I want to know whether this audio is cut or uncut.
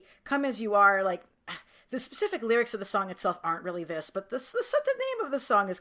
uncut